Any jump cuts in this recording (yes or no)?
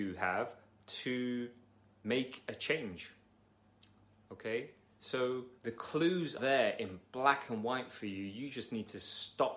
yes